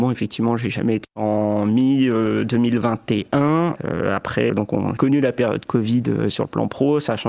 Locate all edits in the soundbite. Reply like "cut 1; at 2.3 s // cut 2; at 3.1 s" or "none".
cut 1; at 1.0 s // cut 2; at 3.8 s // cut 3; at 4.5 s // cut 4; at 5.0 s